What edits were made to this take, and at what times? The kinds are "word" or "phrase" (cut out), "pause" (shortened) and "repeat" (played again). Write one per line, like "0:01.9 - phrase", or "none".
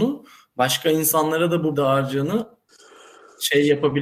0:01.7 - word